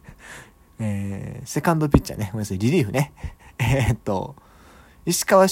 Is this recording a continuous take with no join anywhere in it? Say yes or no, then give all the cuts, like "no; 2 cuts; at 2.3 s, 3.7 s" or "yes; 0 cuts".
yes; 0 cuts